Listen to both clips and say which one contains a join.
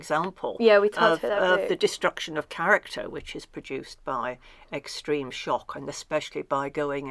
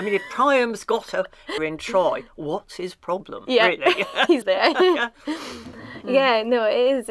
second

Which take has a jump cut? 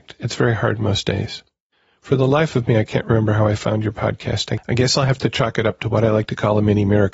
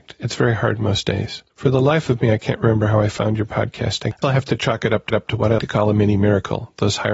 second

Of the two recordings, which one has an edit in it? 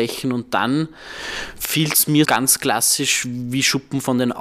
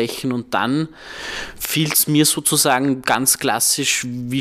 first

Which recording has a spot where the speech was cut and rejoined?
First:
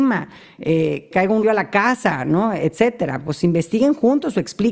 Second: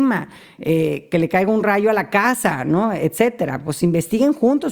first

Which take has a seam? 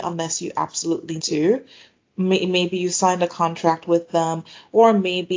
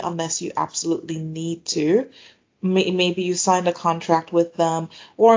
first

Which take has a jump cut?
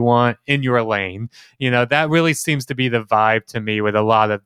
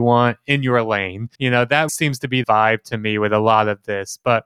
second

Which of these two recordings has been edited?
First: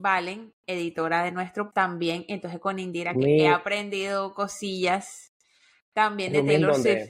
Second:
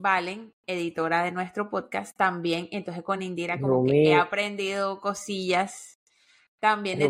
first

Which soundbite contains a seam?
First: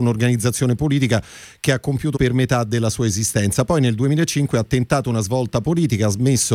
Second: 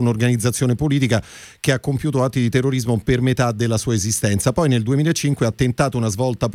first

